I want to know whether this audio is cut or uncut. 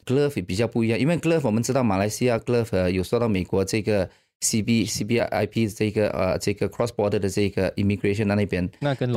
uncut